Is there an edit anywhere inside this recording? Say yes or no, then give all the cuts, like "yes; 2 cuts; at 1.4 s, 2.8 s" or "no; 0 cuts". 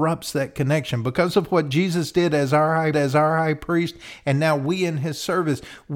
yes; 1 cut; at 2.9 s